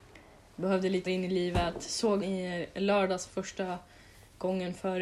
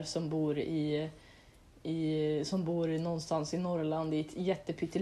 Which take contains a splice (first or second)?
first